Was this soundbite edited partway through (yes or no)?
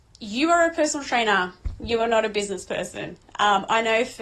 no